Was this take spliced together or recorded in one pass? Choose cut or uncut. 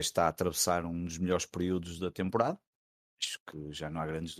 uncut